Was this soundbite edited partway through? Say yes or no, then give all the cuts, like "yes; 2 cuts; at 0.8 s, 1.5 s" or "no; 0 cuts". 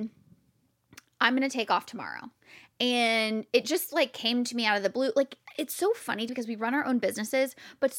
yes; 1 cut; at 6.3 s